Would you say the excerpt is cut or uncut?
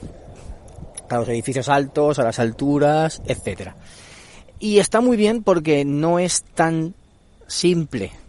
uncut